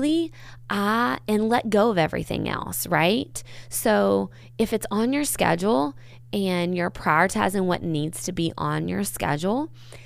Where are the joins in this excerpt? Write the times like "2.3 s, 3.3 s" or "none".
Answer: none